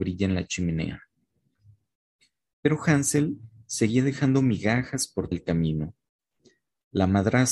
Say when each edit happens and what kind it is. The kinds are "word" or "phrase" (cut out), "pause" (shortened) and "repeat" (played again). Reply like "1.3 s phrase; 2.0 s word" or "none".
5.3 s word